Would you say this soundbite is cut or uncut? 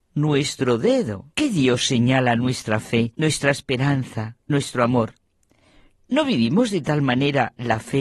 cut